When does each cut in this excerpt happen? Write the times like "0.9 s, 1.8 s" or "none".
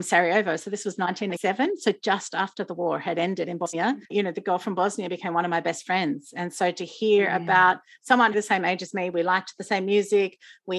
4.0 s, 8.3 s